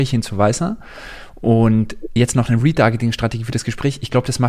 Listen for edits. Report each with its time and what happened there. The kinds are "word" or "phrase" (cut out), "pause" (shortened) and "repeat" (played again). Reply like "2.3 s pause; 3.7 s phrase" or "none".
none